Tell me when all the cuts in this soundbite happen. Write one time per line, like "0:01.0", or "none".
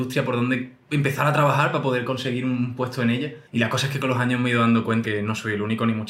0:03.5
0:05.0